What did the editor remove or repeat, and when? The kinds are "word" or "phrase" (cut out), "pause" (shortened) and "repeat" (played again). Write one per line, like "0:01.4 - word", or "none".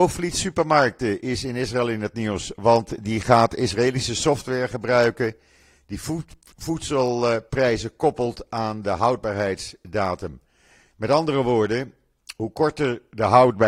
none